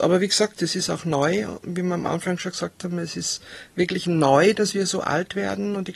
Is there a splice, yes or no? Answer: no